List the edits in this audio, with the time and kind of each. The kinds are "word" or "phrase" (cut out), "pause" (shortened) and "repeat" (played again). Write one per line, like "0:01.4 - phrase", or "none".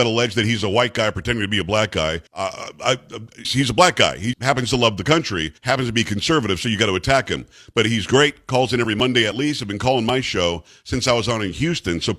0:02.3 - pause
0:03.4 - word
0:04.3 - word
0:05.6 - pause